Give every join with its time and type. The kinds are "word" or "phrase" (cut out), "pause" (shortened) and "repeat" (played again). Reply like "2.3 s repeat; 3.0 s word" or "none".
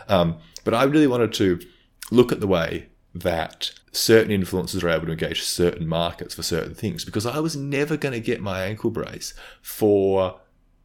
3.8 s pause